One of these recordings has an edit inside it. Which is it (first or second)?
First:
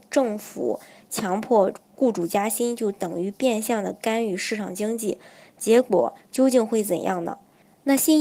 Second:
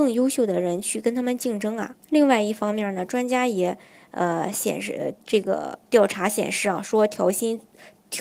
second